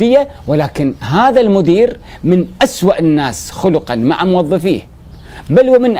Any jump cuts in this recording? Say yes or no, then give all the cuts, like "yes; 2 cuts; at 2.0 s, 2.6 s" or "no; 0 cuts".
no; 0 cuts